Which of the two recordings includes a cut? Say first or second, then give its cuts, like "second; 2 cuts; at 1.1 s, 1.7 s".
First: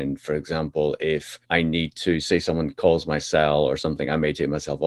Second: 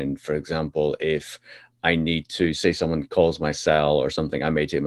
first; 1 cut; at 1.4 s